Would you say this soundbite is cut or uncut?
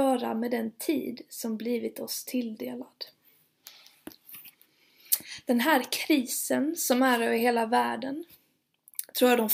uncut